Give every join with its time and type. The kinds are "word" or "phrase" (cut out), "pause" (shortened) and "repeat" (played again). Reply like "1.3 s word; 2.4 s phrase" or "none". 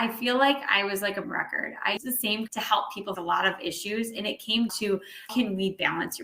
1.2 s word; 2.0 s word; 2.5 s word; 3.2 s word; 4.7 s word; 5.3 s word